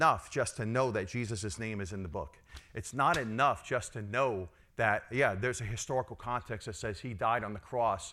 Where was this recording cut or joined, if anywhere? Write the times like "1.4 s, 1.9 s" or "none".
none